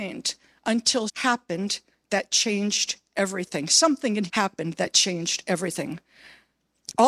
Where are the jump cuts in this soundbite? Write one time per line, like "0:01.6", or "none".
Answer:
0:01.1
0:04.3